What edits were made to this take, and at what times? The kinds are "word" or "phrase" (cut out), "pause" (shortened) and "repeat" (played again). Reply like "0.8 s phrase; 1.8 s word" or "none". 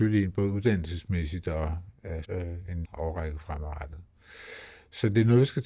2.2 s word; 2.8 s word